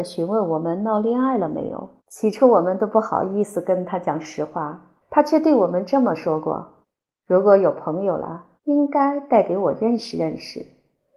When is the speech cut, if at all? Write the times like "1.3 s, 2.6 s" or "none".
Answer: 2.0 s, 5.0 s, 6.8 s, 8.6 s